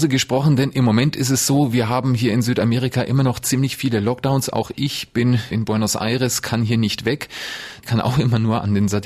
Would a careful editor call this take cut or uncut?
uncut